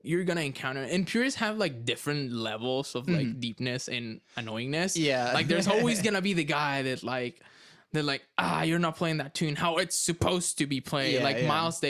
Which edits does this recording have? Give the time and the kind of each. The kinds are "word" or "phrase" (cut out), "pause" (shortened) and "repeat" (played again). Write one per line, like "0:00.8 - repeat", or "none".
none